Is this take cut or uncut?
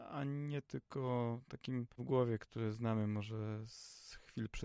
cut